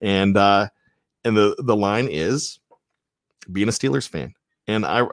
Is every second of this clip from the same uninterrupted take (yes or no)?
yes